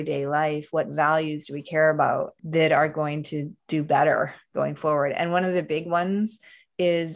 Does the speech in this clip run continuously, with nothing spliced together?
no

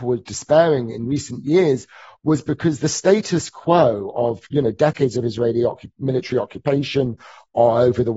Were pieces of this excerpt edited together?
no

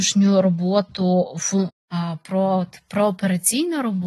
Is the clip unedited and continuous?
no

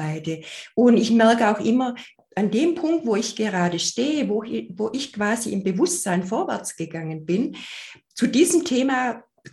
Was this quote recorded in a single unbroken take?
no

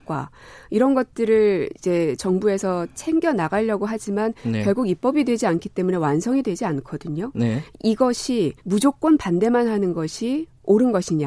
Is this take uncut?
no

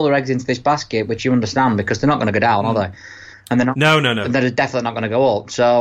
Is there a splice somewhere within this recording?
no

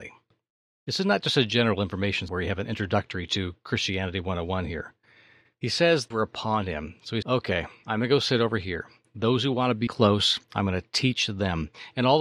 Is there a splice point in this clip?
yes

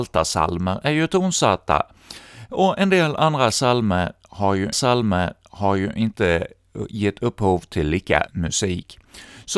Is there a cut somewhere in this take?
yes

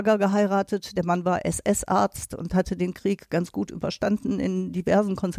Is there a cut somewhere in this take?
no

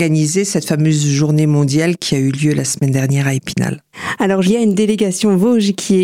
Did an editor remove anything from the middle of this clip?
yes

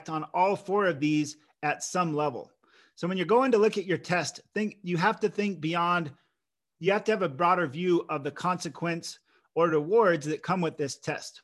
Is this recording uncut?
yes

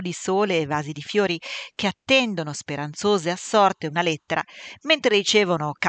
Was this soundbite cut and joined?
no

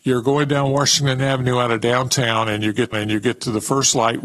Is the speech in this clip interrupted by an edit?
yes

